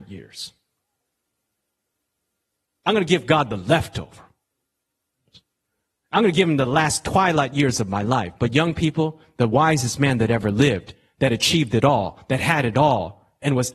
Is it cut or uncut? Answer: uncut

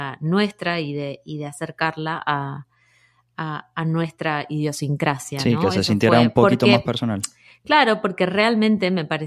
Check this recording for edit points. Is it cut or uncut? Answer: uncut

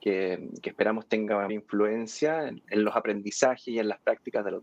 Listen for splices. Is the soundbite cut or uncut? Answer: cut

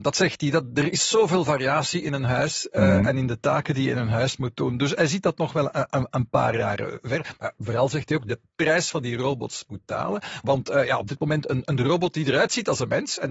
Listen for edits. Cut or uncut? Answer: uncut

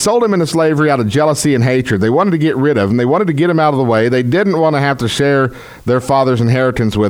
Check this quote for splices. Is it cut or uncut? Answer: uncut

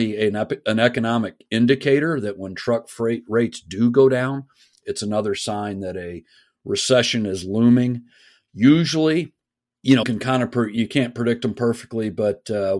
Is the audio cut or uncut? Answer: cut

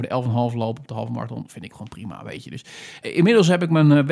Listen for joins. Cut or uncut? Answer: cut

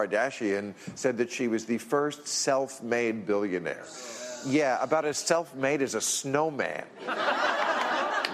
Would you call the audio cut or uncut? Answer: uncut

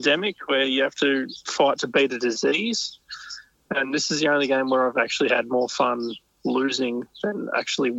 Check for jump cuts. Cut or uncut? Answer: uncut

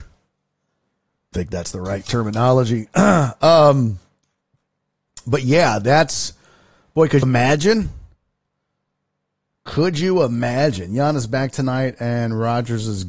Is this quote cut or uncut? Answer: cut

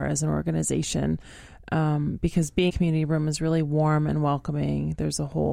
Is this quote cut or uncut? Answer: cut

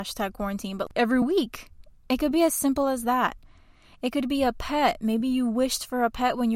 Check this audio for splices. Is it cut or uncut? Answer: uncut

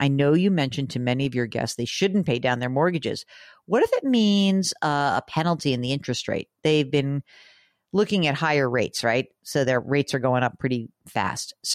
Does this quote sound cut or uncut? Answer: uncut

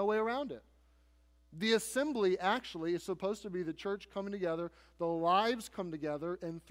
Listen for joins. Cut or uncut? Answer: uncut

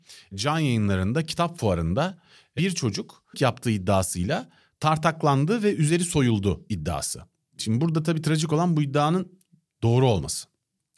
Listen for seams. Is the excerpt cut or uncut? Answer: cut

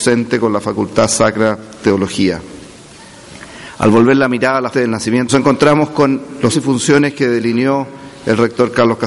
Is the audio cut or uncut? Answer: cut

